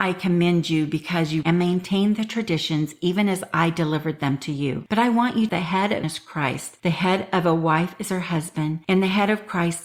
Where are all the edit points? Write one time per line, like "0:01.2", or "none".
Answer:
0:01.4
0:05.5
0:06.0